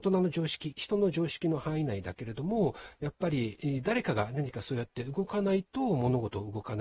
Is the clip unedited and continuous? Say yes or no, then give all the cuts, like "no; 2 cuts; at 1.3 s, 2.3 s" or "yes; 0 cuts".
yes; 0 cuts